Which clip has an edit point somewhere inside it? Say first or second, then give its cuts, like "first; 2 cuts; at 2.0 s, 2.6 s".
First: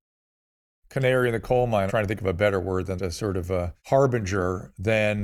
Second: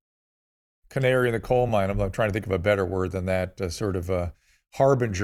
first; 3 cuts; at 1.9 s, 3.0 s, 3.8 s